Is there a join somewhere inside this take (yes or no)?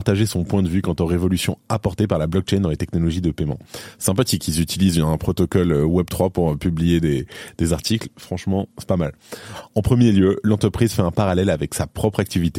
no